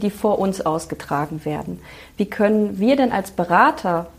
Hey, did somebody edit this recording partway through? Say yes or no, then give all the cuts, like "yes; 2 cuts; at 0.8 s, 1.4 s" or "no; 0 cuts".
no; 0 cuts